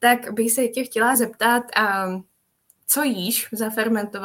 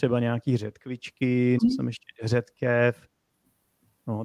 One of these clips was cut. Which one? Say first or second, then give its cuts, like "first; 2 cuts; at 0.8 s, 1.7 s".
second; 1 cut; at 1.6 s